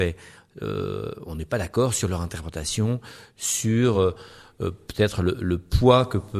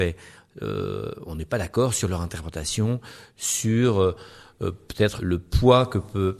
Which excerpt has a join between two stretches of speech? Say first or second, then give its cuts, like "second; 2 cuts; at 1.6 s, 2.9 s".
second; 1 cut; at 5.2 s